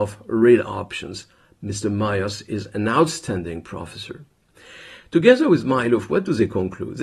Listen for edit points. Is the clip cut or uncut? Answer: uncut